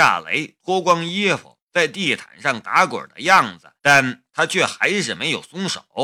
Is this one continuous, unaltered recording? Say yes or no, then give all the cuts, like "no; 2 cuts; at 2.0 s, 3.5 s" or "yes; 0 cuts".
no; 1 cut; at 3.8 s